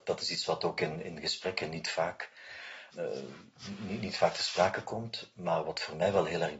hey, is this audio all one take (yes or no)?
no